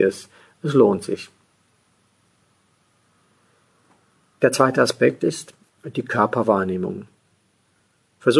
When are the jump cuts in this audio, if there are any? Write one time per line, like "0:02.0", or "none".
none